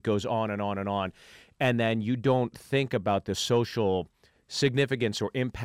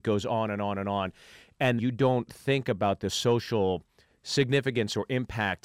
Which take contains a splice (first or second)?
second